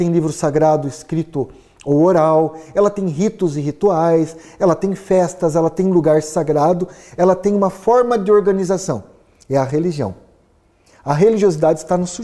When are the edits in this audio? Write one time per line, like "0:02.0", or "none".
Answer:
none